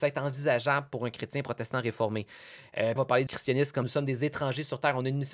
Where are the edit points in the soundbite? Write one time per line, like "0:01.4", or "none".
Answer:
0:03.0
0:03.3
0:03.8